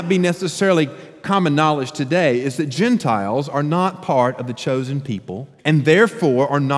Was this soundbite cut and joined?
yes; 1 cut; at 5.6 s

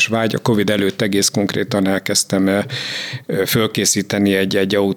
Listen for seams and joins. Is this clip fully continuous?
yes; 0 cuts

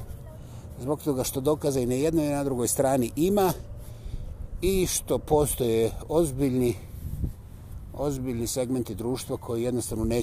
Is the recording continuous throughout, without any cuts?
yes; 0 cuts

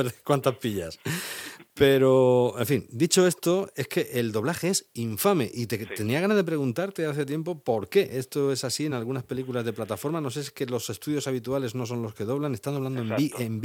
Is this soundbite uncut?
yes; 0 cuts

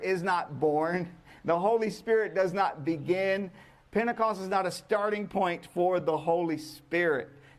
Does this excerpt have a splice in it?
no; 0 cuts

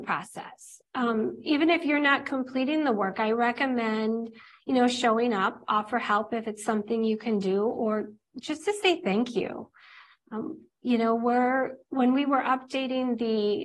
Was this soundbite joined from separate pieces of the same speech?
no; 0 cuts

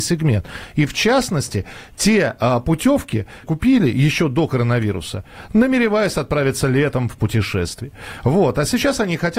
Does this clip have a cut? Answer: yes; 1 cut; at 3.4 s

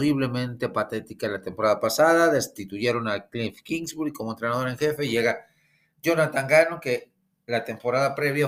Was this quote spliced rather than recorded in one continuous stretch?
no; 0 cuts

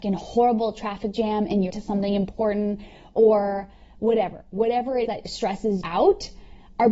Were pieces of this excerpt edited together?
yes; 3 cuts; at 1.7 s, 5.0 s, 5.8 s

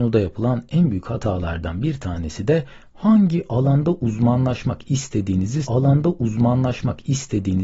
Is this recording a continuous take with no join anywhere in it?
no; 1 cut; at 5.6 s

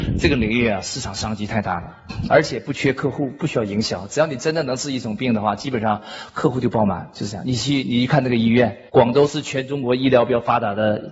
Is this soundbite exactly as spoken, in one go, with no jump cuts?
no; 1 cut; at 8.9 s

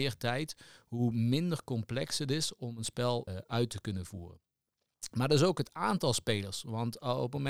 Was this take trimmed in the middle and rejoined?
yes; 1 cut; at 3.3 s

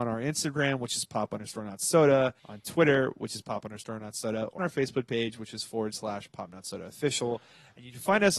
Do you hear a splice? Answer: yes; 2 cuts; at 2.4 s, 4.6 s

